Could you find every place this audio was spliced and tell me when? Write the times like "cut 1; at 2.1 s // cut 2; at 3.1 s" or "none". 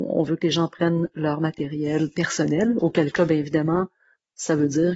none

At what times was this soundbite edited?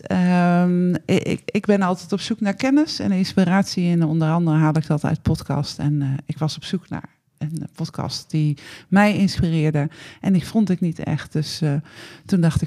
none

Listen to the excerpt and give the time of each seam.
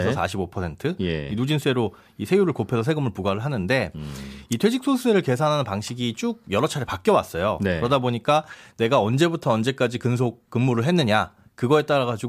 none

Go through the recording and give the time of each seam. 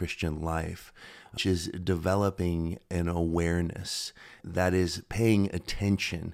cut 1; at 1.4 s // cut 2; at 4.4 s

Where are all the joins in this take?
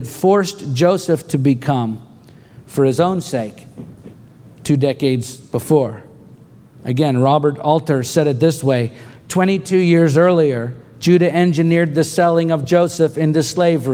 none

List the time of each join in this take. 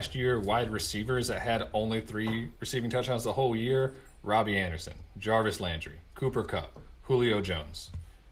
cut 1; at 2.5 s

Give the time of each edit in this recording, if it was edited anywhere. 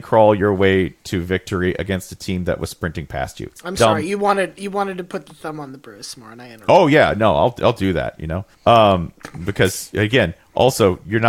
cut 1; at 8.5 s

